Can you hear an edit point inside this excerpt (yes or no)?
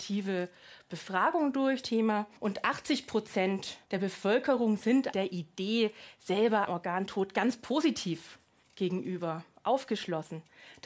yes